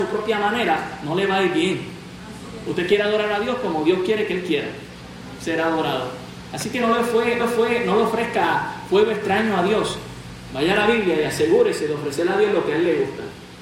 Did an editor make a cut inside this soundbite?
yes; 1 cut; at 7.4 s

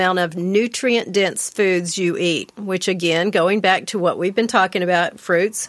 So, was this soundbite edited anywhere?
no; 0 cuts

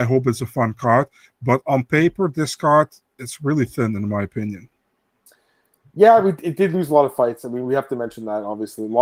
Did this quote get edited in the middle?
no; 0 cuts

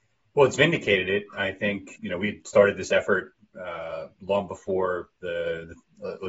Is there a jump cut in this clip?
yes; 1 cut; at 2.0 s

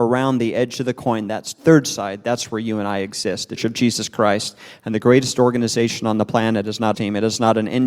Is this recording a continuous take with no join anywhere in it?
no; 2 cuts; at 3.6 s, 6.9 s

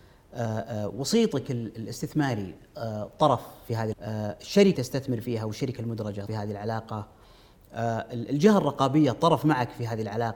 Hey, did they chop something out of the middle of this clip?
yes; 3 cuts; at 3.9 s, 4.7 s, 6.3 s

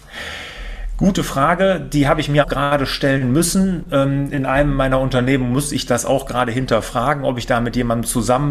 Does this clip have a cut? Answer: yes; 1 cut; at 2.4 s

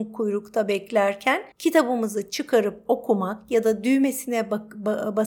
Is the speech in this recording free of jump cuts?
no; 1 cut; at 1.5 s

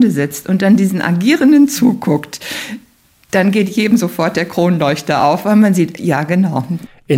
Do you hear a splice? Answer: no; 0 cuts

